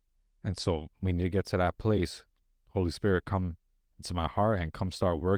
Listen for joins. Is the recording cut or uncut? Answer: uncut